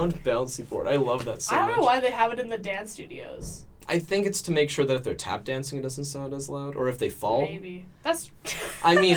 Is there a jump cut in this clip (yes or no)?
no